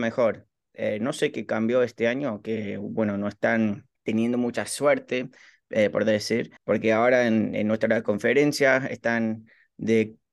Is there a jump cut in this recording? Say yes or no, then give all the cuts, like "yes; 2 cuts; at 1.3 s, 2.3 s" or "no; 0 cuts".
yes; 2 cuts; at 3.9 s, 6.6 s